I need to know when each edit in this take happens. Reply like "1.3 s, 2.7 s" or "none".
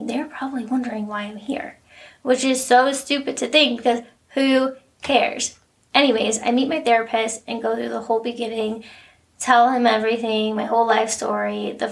none